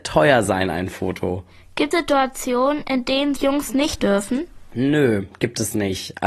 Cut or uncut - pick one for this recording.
cut